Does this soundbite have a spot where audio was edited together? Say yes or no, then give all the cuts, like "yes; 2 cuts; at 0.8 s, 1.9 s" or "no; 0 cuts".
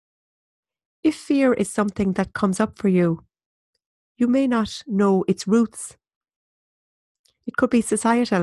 no; 0 cuts